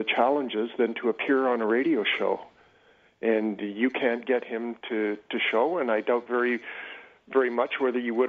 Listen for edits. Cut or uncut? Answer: uncut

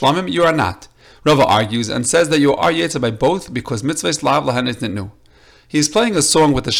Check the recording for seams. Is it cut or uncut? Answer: uncut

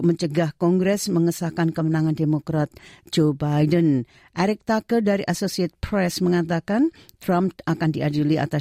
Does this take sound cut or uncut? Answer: uncut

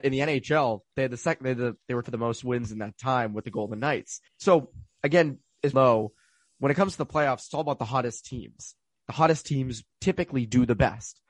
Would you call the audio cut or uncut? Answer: cut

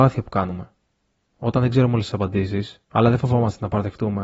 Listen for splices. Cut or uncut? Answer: cut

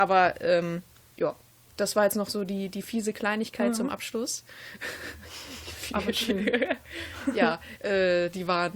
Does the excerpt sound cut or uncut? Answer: uncut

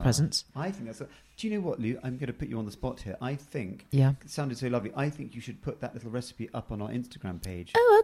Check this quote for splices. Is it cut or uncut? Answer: uncut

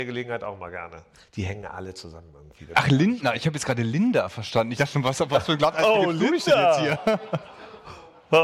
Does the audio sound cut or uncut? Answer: uncut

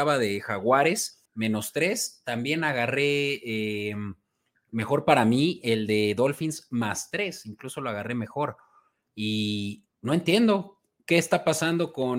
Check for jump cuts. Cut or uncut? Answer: cut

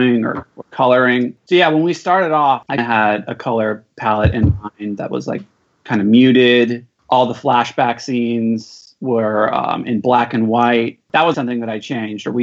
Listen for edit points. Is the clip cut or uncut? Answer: cut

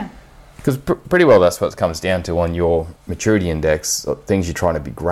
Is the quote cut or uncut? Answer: cut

